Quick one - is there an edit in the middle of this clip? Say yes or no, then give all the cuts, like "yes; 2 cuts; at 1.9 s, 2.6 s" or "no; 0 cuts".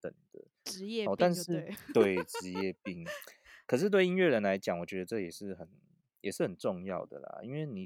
no; 0 cuts